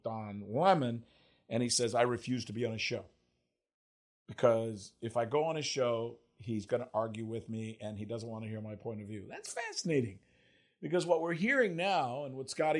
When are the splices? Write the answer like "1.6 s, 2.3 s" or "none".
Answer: 6.7 s

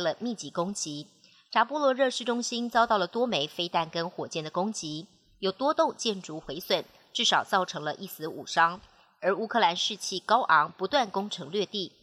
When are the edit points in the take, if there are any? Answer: none

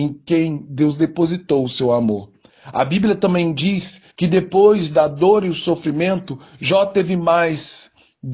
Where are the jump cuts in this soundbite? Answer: 4.1 s

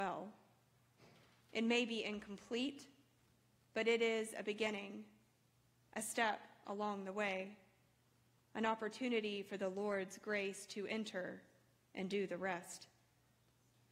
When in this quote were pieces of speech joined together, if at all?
none

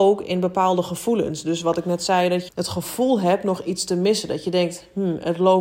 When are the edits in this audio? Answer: 2.5 s

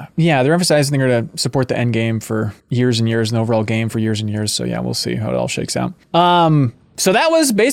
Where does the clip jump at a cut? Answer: 2.6 s, 6.0 s

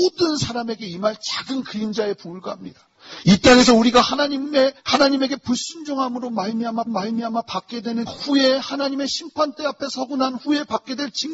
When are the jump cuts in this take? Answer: 4.8 s, 6.9 s, 8.1 s

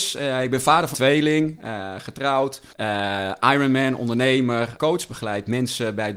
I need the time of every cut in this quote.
0.9 s, 2.7 s, 4.8 s

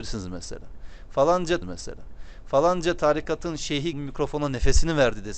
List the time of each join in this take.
1.6 s, 3.9 s

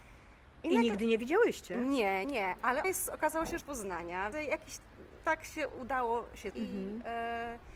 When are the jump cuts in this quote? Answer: 2.2 s, 2.8 s, 3.6 s, 4.3 s, 5.2 s, 6.5 s

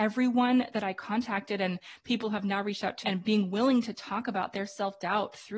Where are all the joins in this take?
3.0 s

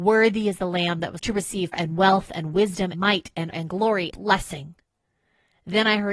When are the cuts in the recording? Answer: 1.2 s, 1.7 s, 2.9 s, 3.5 s, 4.1 s

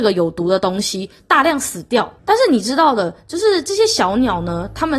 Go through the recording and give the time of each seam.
2.2 s

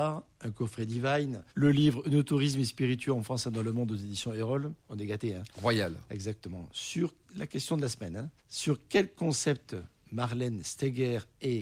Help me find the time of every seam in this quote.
1.5 s, 4.8 s, 7.2 s, 8.4 s

